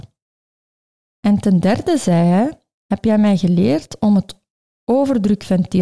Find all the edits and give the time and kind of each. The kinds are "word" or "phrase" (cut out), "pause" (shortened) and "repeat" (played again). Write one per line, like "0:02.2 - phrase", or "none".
none